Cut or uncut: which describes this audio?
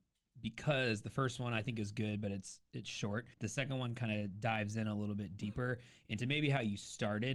cut